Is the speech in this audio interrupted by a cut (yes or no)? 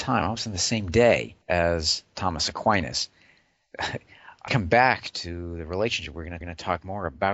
yes